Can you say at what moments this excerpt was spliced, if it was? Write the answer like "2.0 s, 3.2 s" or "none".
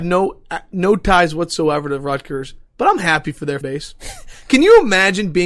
3.6 s